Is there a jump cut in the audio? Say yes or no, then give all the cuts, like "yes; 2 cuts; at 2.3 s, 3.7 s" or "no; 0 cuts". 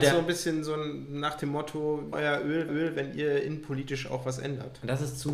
yes; 2 cuts; at 2.1 s, 2.7 s